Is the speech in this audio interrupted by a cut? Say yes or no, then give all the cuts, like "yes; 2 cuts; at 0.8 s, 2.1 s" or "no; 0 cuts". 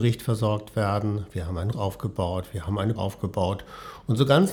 yes; 2 cuts; at 1.7 s, 3.0 s